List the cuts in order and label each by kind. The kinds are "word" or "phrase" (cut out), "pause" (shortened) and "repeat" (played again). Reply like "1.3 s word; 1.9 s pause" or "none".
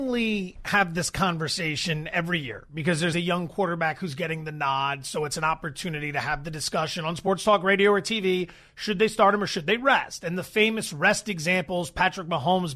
3.1 s word

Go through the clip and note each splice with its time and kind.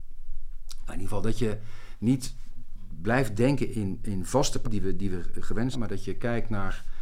3.7 s word; 4.6 s word; 5.7 s word

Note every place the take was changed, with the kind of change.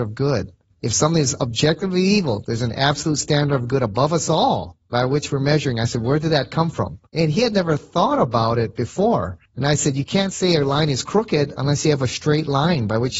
7.1 s pause; 9.5 s pause

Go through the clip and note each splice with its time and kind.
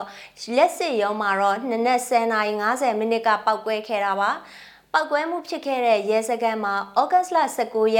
none

